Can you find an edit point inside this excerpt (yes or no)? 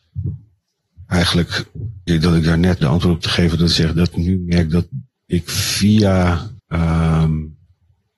yes